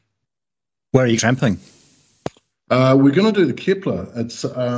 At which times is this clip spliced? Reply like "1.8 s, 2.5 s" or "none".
1.2 s